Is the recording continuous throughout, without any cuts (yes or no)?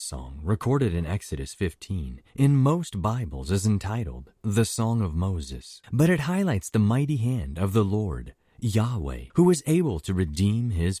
no